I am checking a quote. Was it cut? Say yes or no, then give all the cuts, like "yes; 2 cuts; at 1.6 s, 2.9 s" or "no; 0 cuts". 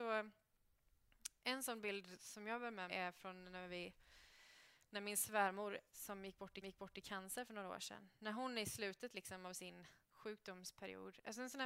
yes; 4 cuts; at 2.9 s, 5.9 s, 6.6 s, 10.0 s